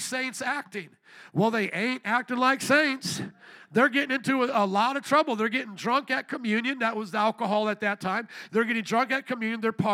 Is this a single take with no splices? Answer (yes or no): yes